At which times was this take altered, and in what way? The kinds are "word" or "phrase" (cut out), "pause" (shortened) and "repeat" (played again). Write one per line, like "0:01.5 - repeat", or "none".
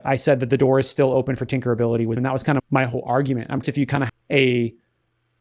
0:02.2 - word
0:02.6 - word
0:03.6 - word
0:04.1 - word